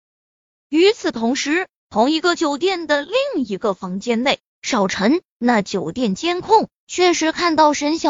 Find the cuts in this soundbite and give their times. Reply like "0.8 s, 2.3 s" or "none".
1.8 s, 4.5 s